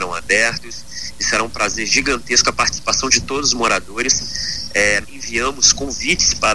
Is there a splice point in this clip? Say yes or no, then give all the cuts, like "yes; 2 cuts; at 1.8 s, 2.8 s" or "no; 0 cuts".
yes; 1 cut; at 5.0 s